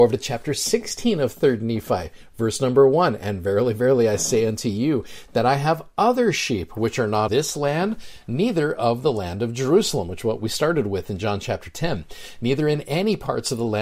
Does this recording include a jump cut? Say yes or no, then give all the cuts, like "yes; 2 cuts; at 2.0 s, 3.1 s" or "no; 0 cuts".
yes; 1 cut; at 7.3 s